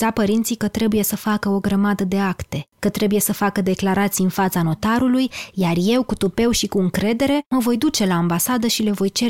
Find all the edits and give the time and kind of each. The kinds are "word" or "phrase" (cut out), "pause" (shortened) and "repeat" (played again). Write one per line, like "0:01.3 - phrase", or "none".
0:07.4 - pause

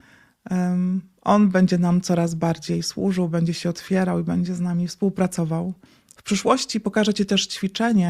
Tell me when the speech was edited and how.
0:05.9 - pause

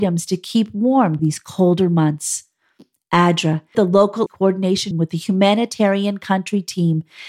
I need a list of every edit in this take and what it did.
0:01.2 - word
0:03.7 - word
0:04.3 - word
0:04.9 - word

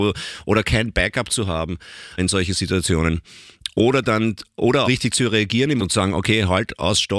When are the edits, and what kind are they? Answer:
0:02.2 - word
0:04.8 - word
0:05.8 - word

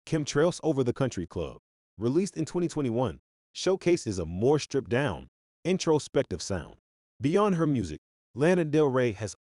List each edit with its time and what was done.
none

